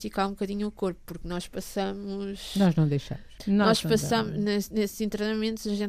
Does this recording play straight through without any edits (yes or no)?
no